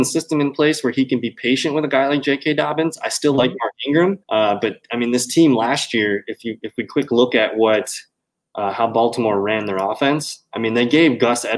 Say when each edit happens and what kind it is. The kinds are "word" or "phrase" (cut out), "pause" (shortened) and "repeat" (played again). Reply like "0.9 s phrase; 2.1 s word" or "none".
4.2 s pause